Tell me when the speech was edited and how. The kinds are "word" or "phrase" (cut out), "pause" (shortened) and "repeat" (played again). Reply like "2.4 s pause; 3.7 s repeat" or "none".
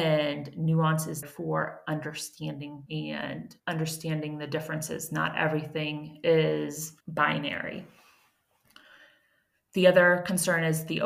1.2 s word; 2.9 s word; 3.6 s pause; 7.0 s pause